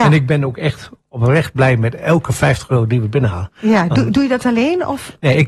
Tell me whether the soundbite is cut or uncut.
uncut